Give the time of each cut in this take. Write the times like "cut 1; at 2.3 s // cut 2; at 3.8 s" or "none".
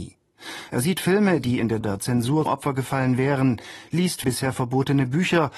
cut 1; at 1.8 s // cut 2; at 2.5 s // cut 3; at 4.2 s